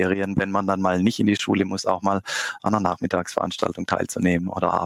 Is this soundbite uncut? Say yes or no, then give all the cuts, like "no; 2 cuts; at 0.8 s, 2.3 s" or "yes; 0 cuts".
yes; 0 cuts